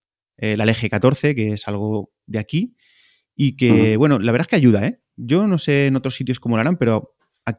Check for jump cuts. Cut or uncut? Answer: uncut